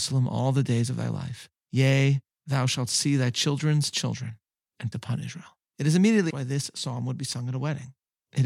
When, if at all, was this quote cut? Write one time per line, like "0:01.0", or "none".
0:01.6
0:04.9
0:05.7
0:06.3